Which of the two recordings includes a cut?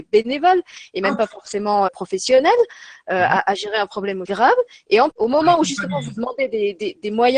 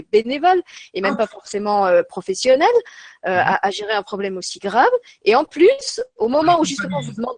first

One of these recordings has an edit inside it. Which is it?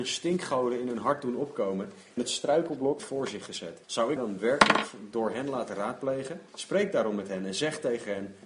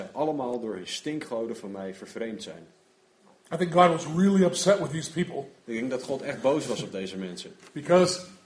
first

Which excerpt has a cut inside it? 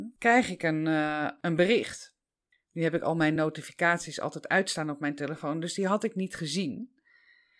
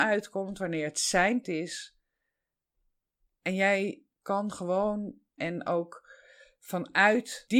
second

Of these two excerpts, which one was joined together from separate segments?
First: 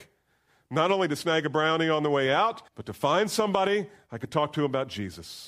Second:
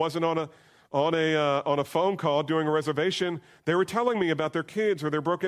first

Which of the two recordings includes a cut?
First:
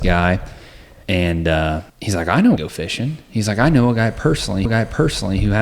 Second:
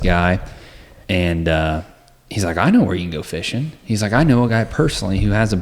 first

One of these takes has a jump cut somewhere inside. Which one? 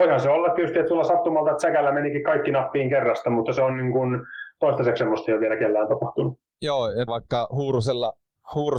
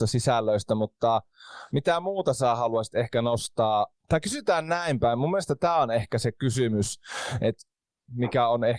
first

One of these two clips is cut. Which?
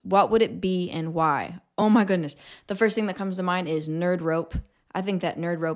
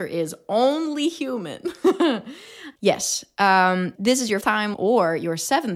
second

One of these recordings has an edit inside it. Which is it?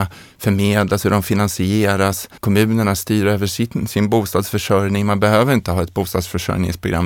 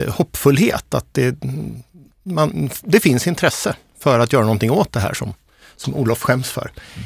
first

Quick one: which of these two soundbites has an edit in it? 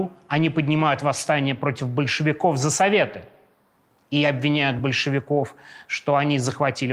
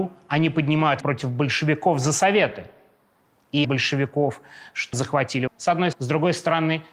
second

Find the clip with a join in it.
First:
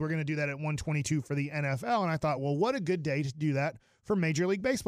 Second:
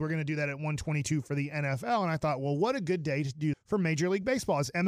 second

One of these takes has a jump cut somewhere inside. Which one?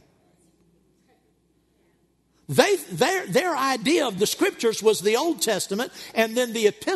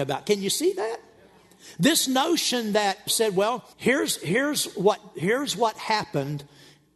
second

